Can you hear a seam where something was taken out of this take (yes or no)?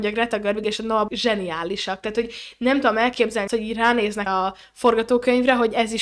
yes